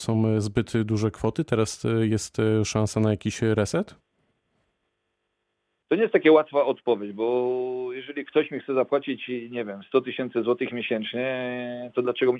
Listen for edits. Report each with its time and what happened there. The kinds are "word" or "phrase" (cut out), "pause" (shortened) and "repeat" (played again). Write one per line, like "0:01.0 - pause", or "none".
none